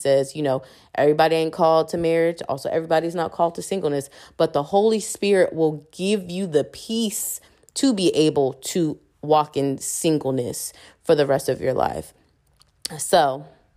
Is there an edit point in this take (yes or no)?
no